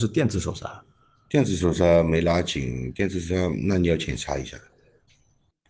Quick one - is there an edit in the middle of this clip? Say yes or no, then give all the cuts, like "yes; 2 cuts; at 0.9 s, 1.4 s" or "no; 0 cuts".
no; 0 cuts